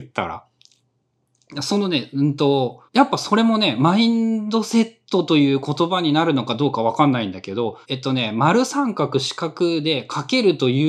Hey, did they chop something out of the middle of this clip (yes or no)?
yes